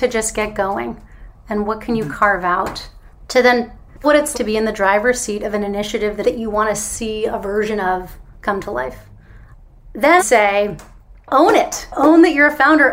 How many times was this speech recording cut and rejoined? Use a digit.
4